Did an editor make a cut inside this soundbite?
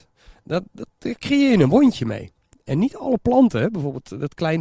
no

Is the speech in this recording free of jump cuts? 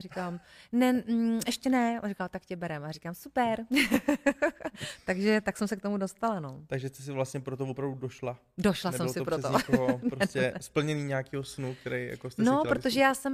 yes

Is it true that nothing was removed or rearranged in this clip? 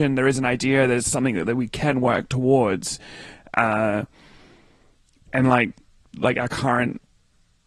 yes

